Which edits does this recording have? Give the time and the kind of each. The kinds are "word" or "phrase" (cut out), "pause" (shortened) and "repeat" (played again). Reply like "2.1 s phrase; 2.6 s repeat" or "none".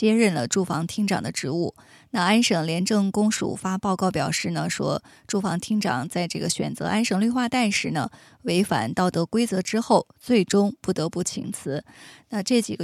none